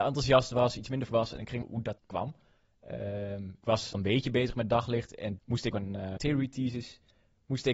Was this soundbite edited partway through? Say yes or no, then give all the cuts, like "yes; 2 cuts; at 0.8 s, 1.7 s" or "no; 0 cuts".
yes; 8 cuts; at 1.1 s, 1.6 s, 2.0 s, 3.6 s, 3.9 s, 5.4 s, 5.7 s, 6.2 s